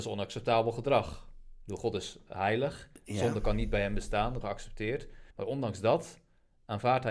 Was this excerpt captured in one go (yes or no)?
no